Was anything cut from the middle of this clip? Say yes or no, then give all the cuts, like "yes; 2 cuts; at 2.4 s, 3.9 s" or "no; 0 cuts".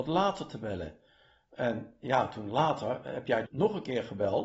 yes; 1 cut; at 3.4 s